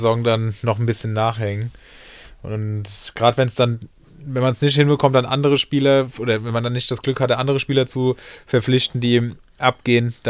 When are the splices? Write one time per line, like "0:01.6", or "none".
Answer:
none